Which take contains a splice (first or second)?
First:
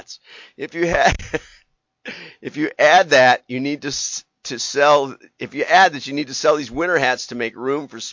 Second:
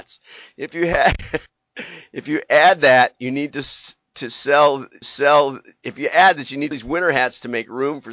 second